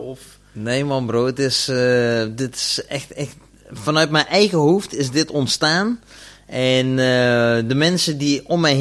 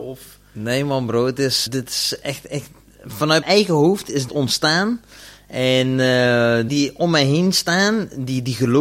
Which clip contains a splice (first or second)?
second